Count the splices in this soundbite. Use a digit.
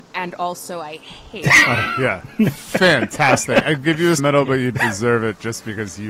2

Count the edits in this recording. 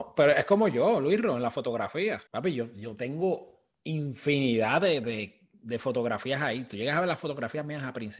2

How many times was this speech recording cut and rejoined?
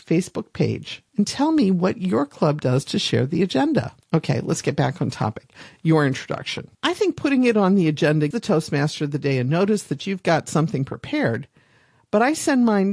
4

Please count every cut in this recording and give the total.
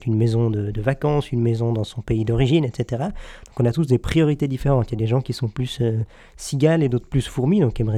0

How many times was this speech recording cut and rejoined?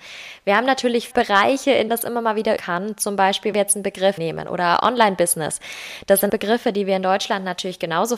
7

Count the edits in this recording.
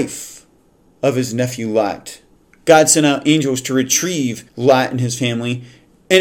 2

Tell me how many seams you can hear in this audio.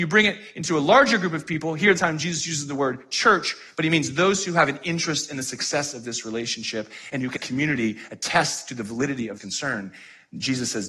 3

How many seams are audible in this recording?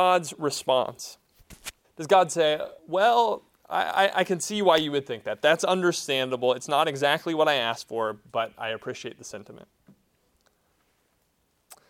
2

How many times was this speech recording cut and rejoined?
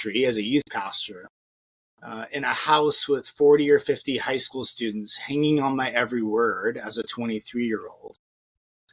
0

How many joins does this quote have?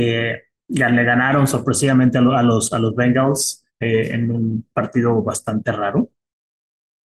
1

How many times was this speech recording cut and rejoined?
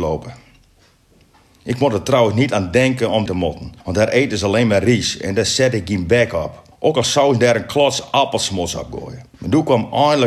4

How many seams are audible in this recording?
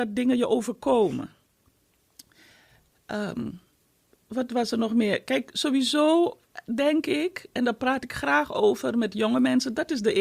0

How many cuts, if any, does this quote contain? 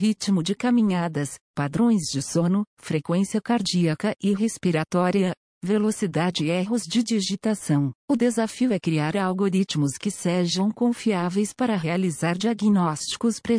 3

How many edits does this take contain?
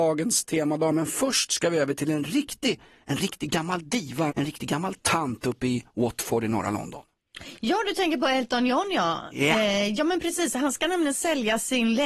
1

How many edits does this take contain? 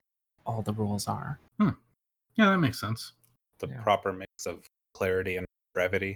1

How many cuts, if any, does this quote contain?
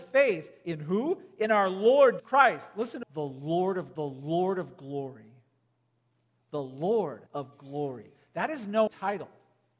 5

